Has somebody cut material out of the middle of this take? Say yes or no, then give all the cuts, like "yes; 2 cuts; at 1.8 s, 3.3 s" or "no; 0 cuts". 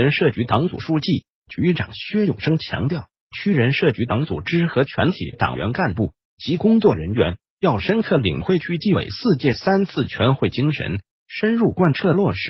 no; 0 cuts